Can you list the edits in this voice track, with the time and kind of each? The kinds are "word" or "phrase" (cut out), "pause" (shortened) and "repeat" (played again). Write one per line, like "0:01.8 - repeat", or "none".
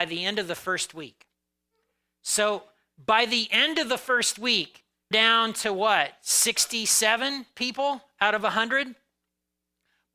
0:05.1 - word